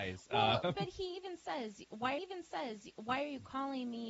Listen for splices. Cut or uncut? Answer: cut